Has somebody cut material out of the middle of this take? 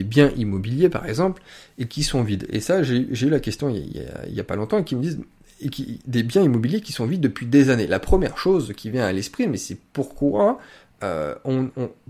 no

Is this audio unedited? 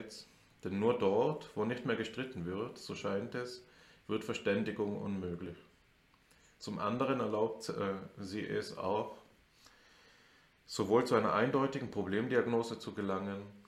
yes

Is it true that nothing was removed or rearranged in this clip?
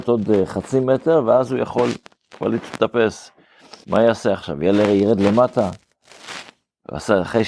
no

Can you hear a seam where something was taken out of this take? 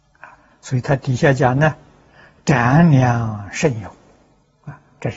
no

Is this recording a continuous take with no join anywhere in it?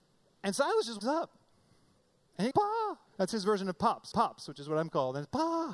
no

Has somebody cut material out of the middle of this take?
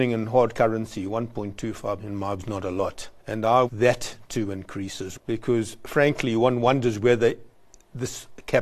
yes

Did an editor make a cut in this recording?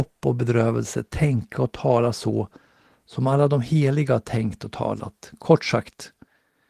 no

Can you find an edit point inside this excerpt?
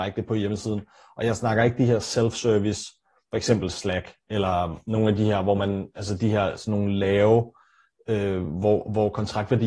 no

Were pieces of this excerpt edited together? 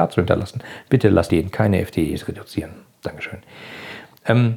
yes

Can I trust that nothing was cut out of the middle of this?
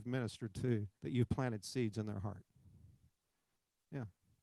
no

